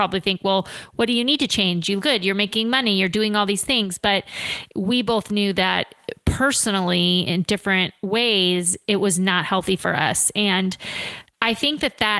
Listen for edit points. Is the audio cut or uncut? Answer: cut